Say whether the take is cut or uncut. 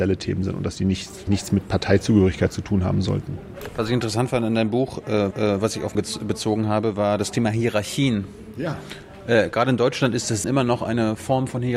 cut